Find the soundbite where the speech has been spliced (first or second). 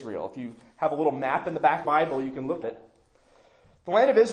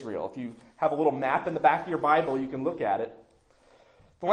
first